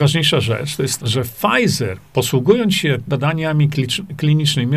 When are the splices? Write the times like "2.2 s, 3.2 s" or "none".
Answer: 1.0 s, 3.1 s